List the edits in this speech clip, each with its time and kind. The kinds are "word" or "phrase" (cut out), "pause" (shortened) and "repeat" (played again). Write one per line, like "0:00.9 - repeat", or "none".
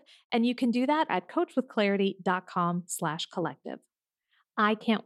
0:01.1 - word